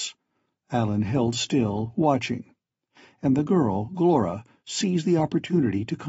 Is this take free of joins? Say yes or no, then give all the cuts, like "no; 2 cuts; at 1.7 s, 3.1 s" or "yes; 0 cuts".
yes; 0 cuts